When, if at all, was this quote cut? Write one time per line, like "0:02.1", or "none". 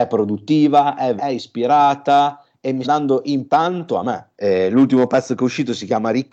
0:01.2
0:02.8
0:03.5